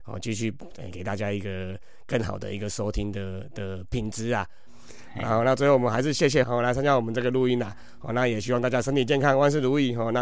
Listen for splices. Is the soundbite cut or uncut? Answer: cut